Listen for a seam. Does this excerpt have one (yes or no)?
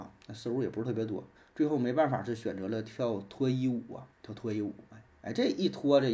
yes